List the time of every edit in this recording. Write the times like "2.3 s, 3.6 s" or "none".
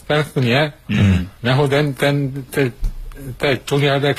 1.4 s

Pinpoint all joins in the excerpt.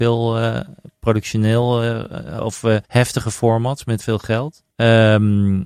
2.4 s, 2.8 s, 4.0 s, 4.7 s

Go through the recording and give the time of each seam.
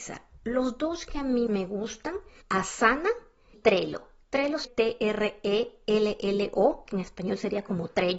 1.5 s, 2.4 s, 3.5 s, 4.6 s, 6.9 s

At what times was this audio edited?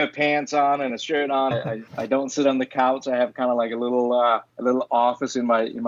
1.5 s, 1.9 s, 4.5 s

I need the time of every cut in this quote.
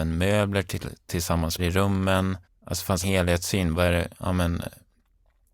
1.6 s, 2.4 s, 3.0 s

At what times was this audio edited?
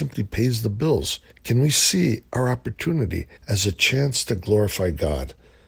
1.3 s, 2.3 s, 3.4 s

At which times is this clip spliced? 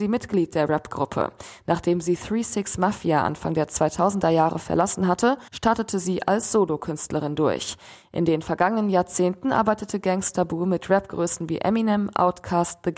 5.5 s

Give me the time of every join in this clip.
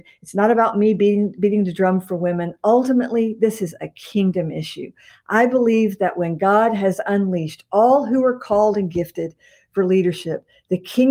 none

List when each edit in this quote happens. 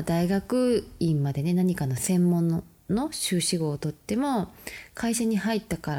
none

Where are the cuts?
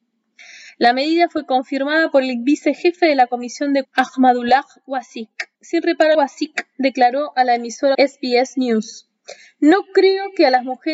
3.8 s, 5.5 s, 6.1 s, 7.9 s

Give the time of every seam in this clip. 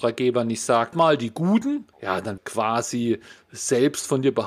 0.9 s, 1.9 s, 2.4 s

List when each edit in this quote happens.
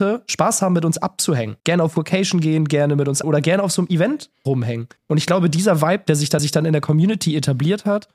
1.6 s, 3.2 s, 5.0 s, 6.4 s

